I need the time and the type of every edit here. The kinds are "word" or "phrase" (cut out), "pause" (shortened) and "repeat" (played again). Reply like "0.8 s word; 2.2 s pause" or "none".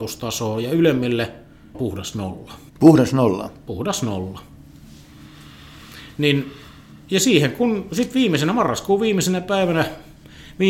1.7 s phrase; 2.7 s pause